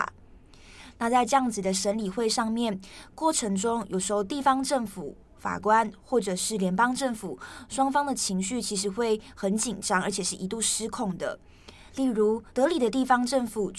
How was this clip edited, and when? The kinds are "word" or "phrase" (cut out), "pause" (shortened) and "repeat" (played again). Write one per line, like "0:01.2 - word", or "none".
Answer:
0:11.9 - pause
0:12.5 - pause